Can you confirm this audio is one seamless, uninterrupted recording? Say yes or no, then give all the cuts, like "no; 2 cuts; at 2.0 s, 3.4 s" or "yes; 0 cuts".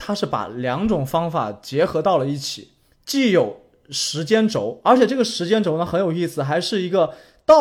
yes; 0 cuts